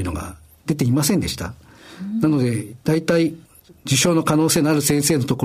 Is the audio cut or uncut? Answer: cut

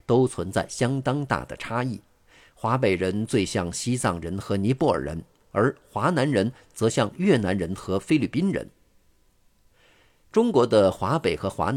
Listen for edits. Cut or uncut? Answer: uncut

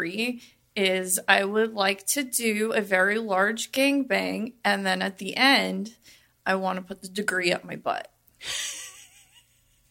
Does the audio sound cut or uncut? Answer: uncut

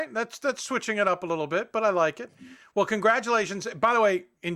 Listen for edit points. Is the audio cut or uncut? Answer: uncut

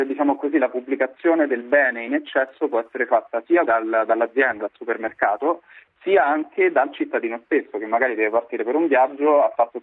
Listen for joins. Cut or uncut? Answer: cut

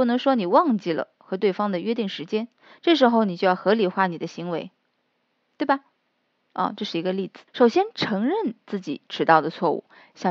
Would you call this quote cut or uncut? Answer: cut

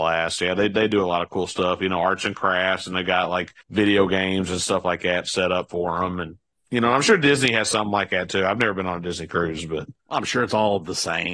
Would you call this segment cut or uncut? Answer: cut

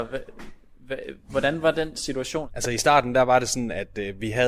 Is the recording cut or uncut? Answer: uncut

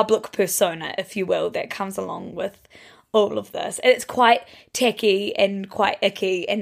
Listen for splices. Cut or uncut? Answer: uncut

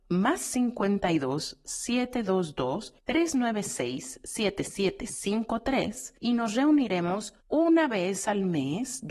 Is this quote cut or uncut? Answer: cut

